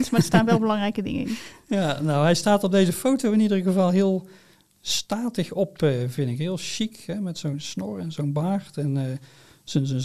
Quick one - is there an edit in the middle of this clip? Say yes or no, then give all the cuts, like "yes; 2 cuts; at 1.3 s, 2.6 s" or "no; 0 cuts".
no; 0 cuts